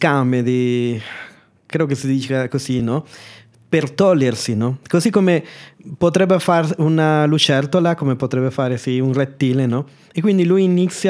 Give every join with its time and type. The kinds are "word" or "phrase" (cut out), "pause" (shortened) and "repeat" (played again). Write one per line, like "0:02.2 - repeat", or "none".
none

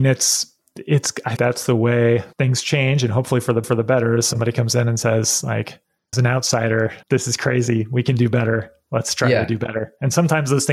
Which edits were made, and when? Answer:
0:01.4 - word
0:02.3 - pause
0:03.6 - repeat
0:06.1 - phrase
0:07.0 - pause

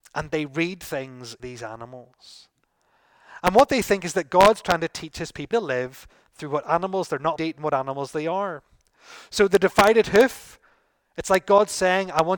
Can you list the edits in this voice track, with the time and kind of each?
0:01.4 - word
0:05.5 - word
0:07.4 - word

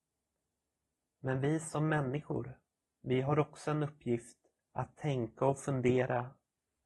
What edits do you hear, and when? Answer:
0:02.8 - pause
0:04.6 - pause

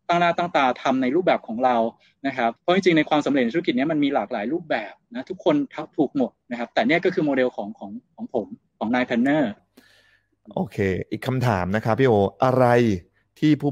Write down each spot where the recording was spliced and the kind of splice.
0:02.6 - pause

